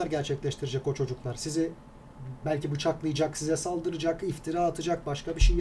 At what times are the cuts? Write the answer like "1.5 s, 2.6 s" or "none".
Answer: 2.4 s

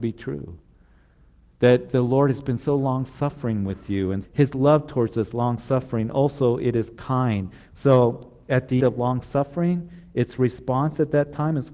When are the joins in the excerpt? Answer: 4.2 s, 8.8 s

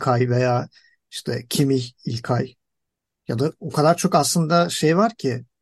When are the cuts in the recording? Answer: none

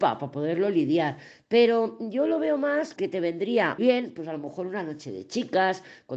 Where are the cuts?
3.0 s, 3.8 s

